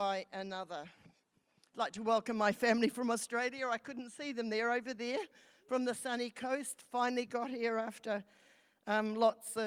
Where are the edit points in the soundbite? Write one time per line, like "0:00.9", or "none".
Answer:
none